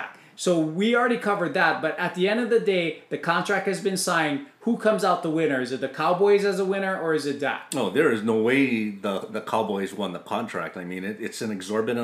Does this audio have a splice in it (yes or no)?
no